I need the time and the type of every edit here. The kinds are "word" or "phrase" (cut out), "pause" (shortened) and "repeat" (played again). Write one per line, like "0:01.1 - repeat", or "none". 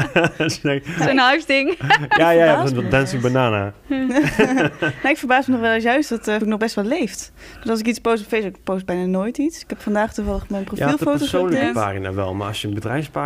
0:06.4 - word

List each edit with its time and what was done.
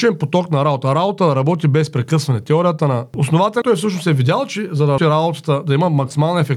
0:03.6 - phrase
0:05.0 - word

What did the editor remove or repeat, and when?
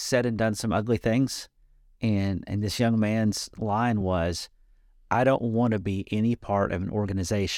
none

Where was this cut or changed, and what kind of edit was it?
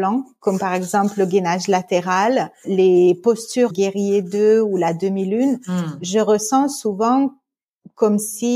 0:02.6 - word
0:03.7 - phrase

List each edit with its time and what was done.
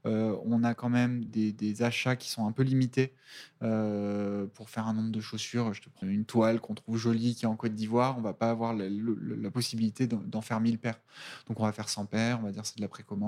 0:01.3 - word
0:06.0 - word

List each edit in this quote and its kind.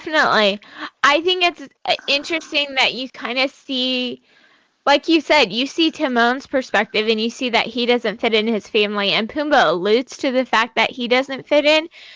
none

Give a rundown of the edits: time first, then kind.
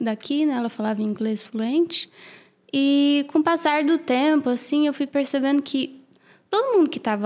none

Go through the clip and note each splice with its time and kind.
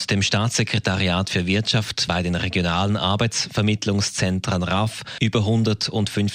0:02.1 - word

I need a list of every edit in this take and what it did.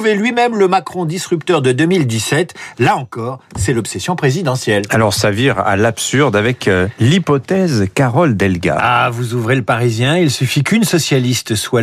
none

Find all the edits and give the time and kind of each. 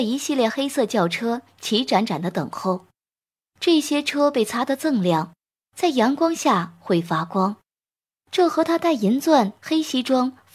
none

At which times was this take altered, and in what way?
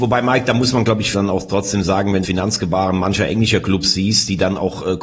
0:01.1 - word
0:02.2 - phrase

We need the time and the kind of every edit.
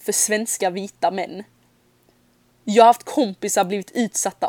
none

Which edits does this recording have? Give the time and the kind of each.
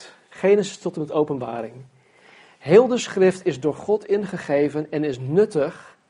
none

